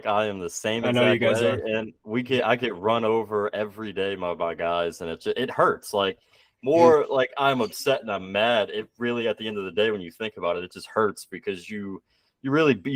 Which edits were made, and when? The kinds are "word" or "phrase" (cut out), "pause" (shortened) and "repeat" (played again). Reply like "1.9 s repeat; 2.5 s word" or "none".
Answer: none